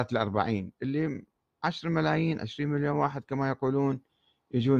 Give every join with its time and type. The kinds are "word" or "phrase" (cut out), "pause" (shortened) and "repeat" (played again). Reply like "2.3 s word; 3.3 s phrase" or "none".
none